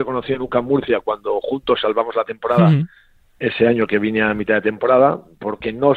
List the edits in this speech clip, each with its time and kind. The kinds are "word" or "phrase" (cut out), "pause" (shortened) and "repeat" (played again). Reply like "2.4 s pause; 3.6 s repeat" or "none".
none